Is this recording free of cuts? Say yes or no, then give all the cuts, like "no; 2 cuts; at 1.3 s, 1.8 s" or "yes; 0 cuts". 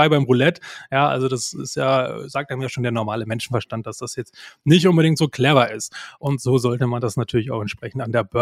yes; 0 cuts